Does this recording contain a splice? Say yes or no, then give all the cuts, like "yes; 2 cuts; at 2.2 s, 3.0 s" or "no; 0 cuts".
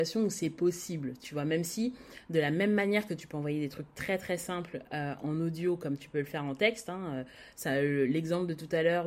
no; 0 cuts